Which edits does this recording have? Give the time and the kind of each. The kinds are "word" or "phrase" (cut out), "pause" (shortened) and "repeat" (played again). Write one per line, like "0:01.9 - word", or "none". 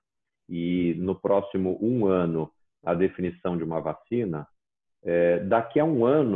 none

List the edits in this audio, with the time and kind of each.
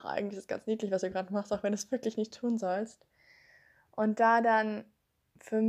none

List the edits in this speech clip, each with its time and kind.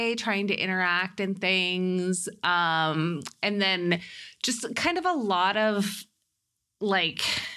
none

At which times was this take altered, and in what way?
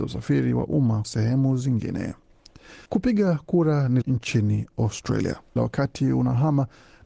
0:01.0 - word
0:02.9 - pause
0:04.0 - word
0:05.6 - word

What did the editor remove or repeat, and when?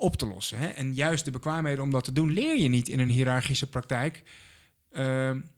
none

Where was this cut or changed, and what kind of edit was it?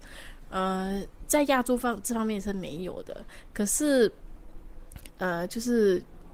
none

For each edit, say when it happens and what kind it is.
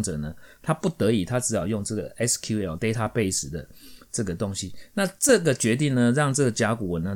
0:02.8 - phrase

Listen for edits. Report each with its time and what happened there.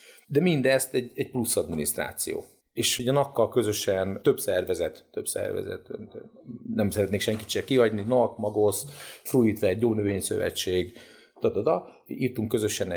none

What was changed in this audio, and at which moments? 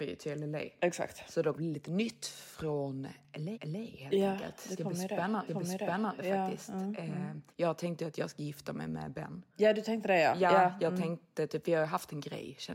0:01.5 - phrase
0:03.5 - repeat
0:05.5 - repeat
0:07.5 - pause
0:09.5 - pause
0:11.6 - word

